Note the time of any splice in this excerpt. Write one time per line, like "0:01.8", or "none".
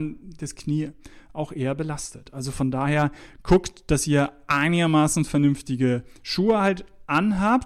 none

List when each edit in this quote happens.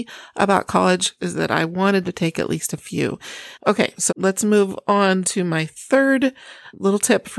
0:01.2
0:02.0
0:04.1
0:05.2

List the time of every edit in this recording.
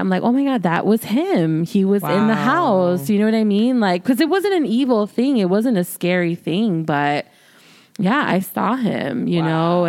none

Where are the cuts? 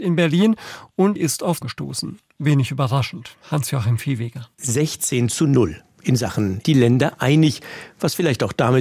0:01.2
0:01.6
0:04.5
0:06.6

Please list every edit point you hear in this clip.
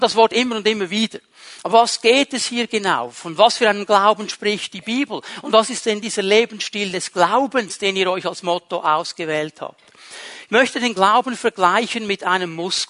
0:01.7

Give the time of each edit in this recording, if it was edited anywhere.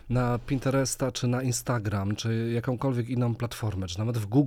none

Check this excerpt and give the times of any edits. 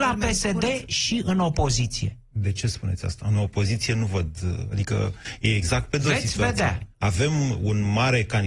0:06.9

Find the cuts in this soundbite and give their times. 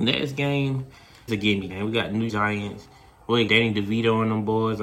0:01.3
0:01.7
0:02.3
0:03.5

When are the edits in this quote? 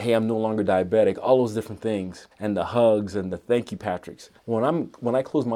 0:02.3
0:04.4

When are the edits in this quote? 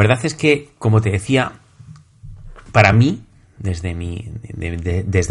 none

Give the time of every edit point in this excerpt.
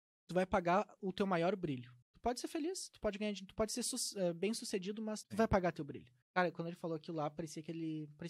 0:02.0
0:05.2
0:06.2

